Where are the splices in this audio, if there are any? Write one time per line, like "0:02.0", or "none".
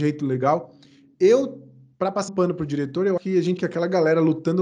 0:02.3
0:03.2
0:03.6